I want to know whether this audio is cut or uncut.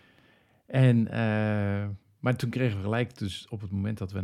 uncut